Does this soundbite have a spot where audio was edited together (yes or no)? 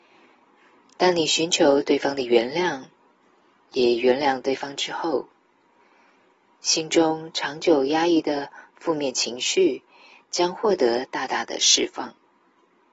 no